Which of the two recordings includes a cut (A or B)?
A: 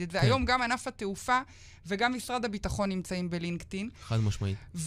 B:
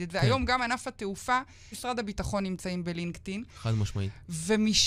B